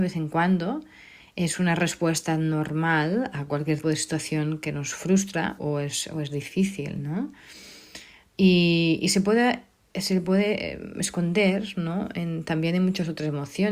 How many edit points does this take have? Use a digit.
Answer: 2